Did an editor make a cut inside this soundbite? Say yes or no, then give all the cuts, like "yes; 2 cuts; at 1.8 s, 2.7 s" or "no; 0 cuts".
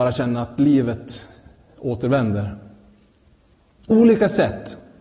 yes; 1 cut; at 3.9 s